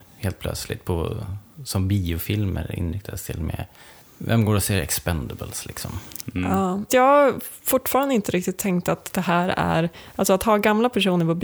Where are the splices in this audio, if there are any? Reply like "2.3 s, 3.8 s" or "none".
6.9 s